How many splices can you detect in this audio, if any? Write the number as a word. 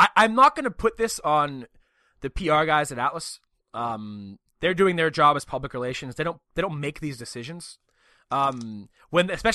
zero